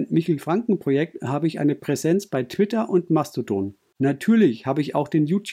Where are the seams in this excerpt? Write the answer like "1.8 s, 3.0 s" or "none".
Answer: none